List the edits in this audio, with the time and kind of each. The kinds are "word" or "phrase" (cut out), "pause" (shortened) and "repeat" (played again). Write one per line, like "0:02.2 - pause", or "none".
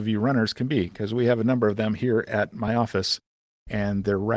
none